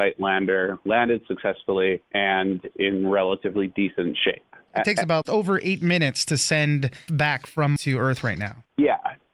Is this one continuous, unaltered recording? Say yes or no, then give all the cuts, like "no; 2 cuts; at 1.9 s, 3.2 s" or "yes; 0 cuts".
no; 4 cuts; at 2.7 s, 5.2 s, 7.1 s, 7.8 s